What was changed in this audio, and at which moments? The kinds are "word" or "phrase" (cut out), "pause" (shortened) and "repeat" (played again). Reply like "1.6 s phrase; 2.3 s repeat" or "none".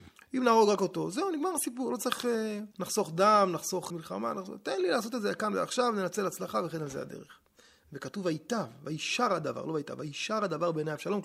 2.7 s pause; 3.9 s word